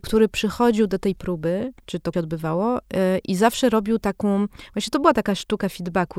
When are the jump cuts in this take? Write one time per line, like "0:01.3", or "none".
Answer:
0:01.2
0:01.8
0:02.1